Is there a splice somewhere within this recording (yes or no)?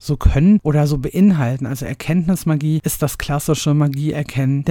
no